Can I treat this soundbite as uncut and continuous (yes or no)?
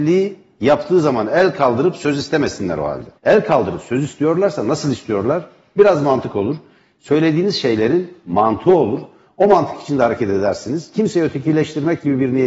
no